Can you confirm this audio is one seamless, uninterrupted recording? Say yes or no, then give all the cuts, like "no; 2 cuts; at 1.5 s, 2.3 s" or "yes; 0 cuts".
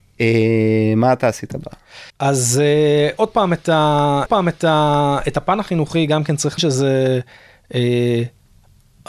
no; 3 cuts; at 2.1 s, 4.3 s, 6.6 s